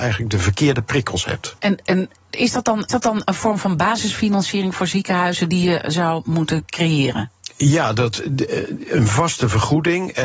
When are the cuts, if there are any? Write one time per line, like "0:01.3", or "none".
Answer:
0:01.6
0:02.9